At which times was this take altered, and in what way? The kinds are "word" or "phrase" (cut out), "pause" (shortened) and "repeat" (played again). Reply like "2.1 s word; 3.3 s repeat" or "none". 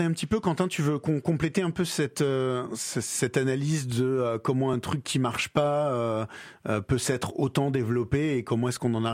none